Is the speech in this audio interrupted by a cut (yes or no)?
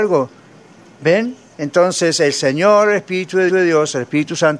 yes